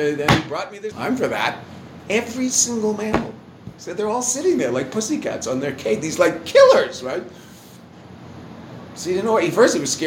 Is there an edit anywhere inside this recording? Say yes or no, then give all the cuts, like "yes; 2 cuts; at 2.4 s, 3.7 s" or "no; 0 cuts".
yes; 1 cut; at 0.9 s